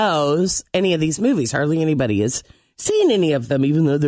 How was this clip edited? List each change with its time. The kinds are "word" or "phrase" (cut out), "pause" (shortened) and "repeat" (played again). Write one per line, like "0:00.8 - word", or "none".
none